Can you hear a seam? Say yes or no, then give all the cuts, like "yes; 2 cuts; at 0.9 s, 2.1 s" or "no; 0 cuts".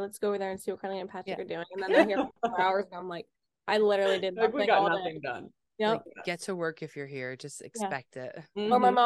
no; 0 cuts